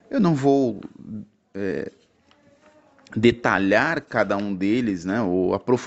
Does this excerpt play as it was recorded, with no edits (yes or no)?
yes